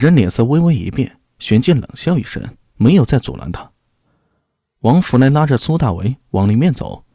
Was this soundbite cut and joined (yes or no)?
no